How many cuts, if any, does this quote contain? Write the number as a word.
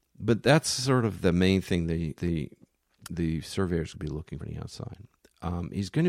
four